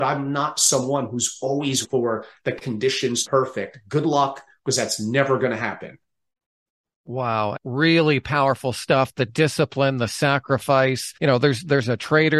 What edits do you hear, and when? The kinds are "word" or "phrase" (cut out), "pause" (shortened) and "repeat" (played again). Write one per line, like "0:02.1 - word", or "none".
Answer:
0:01.8 - word
0:03.2 - phrase
0:07.6 - word
0:11.2 - pause